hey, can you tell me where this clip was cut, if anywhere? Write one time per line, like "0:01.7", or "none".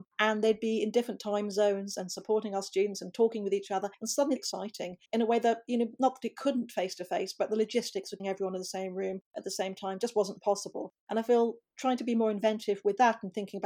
0:03.9
0:04.4
0:05.1
0:08.2
0:09.3
0:11.0